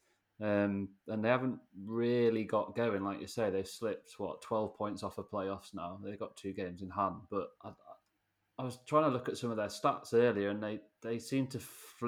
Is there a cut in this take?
yes; 1 cut; at 7.6 s

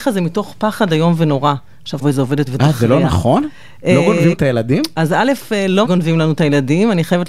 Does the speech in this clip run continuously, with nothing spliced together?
no; 4 cuts; at 2.0 s, 2.5 s, 4.3 s, 5.8 s

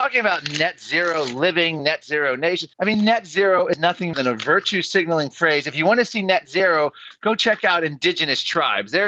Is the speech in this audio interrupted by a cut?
yes; 2 cuts; at 2.7 s, 4.1 s

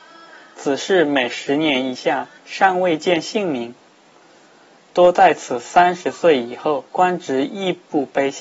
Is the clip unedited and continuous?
no; 2 cuts; at 2.4 s, 6.9 s

